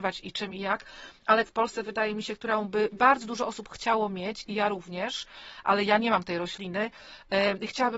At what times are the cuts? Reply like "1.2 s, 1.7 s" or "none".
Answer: 1.5 s